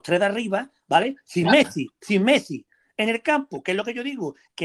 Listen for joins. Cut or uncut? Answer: uncut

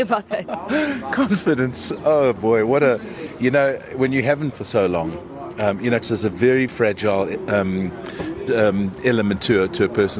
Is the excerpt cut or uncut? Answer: cut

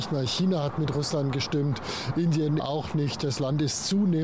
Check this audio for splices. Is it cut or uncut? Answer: cut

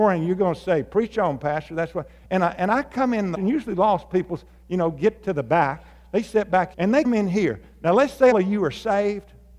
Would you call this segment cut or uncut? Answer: cut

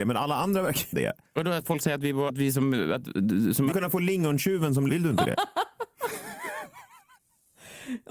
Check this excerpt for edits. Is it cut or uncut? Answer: cut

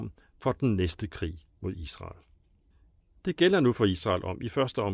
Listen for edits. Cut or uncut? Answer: cut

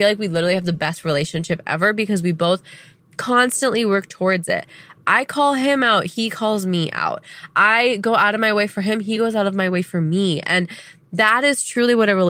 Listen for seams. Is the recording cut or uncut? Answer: uncut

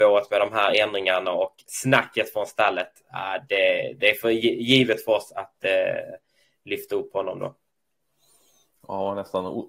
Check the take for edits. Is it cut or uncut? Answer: uncut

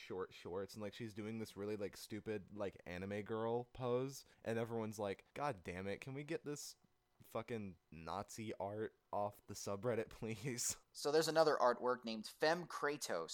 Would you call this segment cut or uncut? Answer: cut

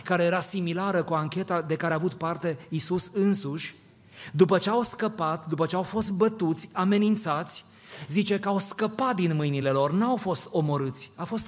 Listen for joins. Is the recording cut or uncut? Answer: uncut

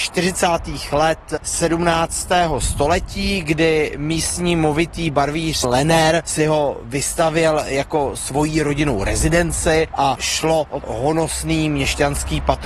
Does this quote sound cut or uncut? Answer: cut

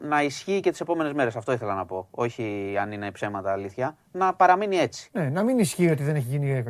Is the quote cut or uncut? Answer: uncut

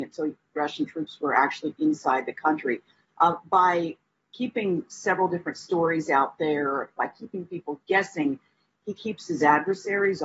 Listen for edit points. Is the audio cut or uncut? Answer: uncut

